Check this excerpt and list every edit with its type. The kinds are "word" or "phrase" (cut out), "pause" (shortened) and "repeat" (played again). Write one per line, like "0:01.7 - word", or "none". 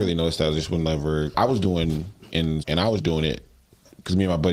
0:01.3 - word
0:02.3 - word
0:02.6 - word
0:03.0 - word

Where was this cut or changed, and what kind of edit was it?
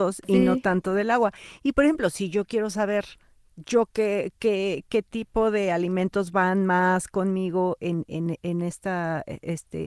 none

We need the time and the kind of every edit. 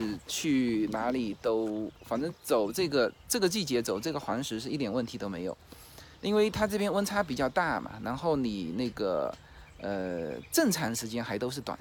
0:02.0 - pause
0:06.1 - pause

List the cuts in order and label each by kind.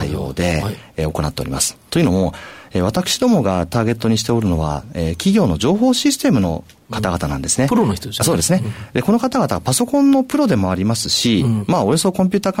none

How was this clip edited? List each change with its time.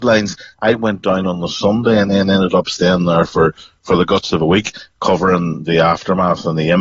none

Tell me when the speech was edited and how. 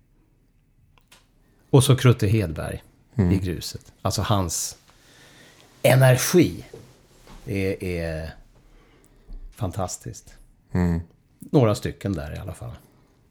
0:04.0 - pause

